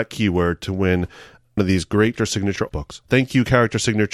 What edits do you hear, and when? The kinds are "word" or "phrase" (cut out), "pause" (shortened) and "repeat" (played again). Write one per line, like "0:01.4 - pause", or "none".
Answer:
0:01.6 - word
0:02.2 - word
0:02.7 - word